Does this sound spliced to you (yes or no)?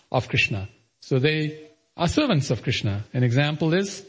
no